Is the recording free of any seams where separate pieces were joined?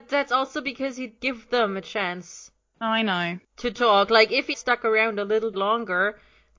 no; 3 cuts; at 1.2 s, 4.5 s, 5.5 s

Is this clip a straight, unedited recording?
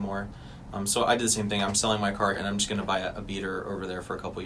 no; 1 cut; at 2.3 s

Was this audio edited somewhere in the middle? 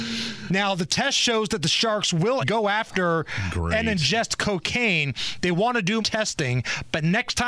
yes; 2 cuts; at 2.4 s, 6.0 s

